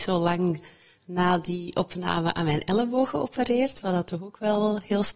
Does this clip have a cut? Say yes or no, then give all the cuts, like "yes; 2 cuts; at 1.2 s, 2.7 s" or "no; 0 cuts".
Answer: no; 0 cuts